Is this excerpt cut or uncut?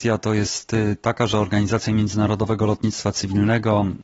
uncut